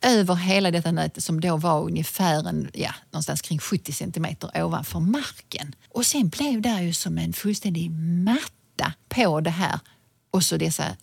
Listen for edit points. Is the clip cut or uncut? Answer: cut